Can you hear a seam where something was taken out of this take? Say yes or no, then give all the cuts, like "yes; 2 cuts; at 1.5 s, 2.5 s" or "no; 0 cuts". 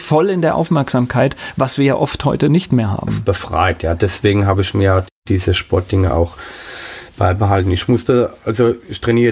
no; 0 cuts